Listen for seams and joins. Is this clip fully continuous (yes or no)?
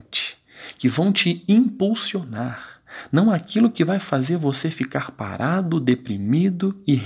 yes